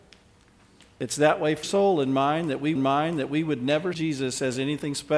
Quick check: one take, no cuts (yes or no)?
no